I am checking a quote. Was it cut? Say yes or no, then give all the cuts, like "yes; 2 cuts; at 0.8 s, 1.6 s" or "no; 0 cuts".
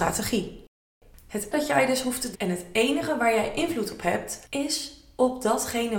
yes; 3 cuts; at 1.5 s, 2.3 s, 4.4 s